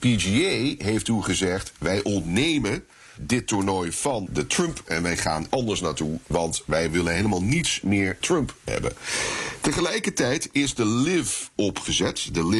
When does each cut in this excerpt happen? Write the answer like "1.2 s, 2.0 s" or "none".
3.2 s, 4.3 s, 4.9 s, 5.5 s, 8.2 s, 8.7 s

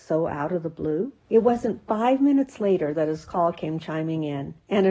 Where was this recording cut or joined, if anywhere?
1.2 s

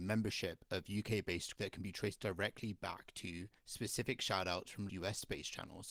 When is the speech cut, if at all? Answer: 1.6 s, 3.6 s, 4.9 s

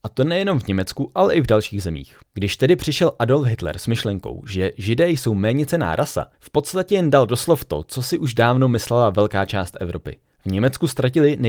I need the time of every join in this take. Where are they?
2.3 s, 6.3 s, 10.3 s

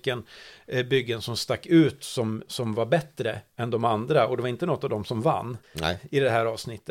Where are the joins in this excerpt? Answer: 5.6 s

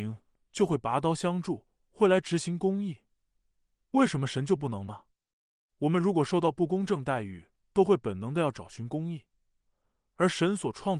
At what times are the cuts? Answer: none

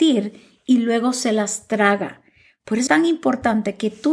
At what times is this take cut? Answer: 2.9 s

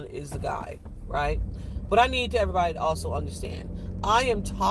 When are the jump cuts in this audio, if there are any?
none

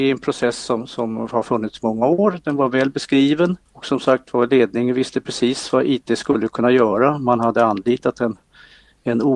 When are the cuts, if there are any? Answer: 3.7 s

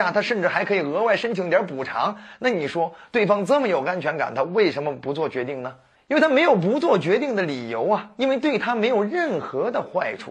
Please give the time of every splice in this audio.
5.9 s

